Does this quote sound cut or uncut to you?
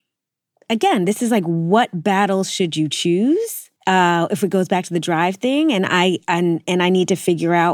cut